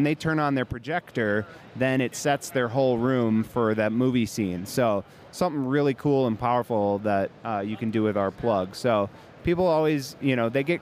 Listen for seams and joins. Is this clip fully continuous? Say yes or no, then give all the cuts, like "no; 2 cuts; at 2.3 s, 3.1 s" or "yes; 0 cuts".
yes; 0 cuts